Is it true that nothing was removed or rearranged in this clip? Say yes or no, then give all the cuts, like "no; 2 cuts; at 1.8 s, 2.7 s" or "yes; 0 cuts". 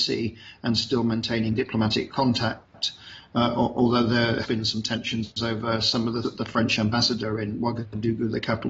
no; 2 cuts; at 4.4 s, 6.2 s